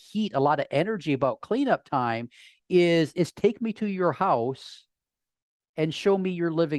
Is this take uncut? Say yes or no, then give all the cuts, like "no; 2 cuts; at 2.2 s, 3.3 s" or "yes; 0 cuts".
yes; 0 cuts